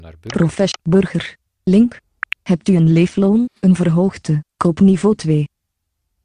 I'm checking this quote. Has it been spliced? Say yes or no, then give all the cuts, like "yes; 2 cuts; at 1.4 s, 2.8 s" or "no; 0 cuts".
yes; 2 cuts; at 3.6 s, 4.5 s